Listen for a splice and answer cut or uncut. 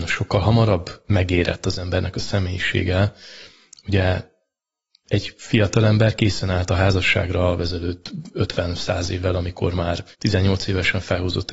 cut